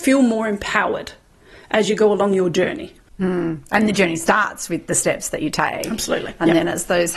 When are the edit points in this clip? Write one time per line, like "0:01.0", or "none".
none